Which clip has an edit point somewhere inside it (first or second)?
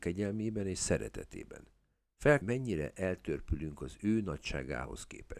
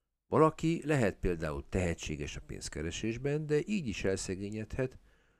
first